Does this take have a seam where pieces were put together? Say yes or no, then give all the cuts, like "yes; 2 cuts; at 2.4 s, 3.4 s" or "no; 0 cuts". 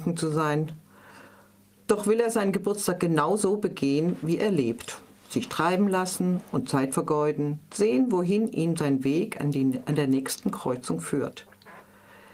no; 0 cuts